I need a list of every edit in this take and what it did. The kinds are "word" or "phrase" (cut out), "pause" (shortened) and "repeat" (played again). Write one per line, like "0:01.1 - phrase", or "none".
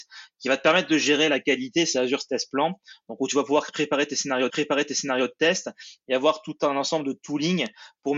0:04.5 - repeat